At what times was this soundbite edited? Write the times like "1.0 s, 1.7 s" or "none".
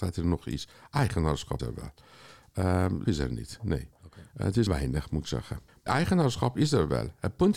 1.6 s, 3.0 s, 4.7 s, 5.9 s